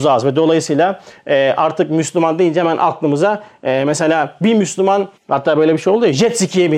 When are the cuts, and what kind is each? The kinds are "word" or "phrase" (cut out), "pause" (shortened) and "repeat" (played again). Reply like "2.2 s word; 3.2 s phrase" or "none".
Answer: 5.2 s pause